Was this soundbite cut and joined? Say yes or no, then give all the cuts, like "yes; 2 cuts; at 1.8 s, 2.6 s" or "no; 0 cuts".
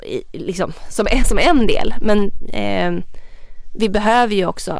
no; 0 cuts